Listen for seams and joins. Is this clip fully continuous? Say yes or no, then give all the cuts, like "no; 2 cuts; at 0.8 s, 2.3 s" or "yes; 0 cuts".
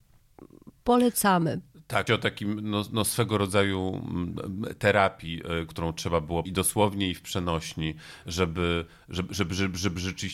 no; 3 cuts; at 2.1 s, 5.7 s, 6.5 s